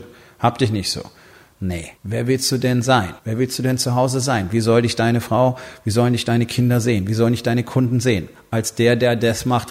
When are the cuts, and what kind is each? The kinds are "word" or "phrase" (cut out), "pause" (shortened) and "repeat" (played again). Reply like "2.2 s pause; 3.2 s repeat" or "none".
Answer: 2.0 s pause; 3.2 s pause